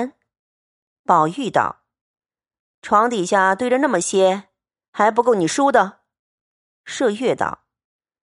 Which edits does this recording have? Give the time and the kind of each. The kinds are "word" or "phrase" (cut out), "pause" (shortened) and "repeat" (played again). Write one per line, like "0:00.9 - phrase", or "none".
none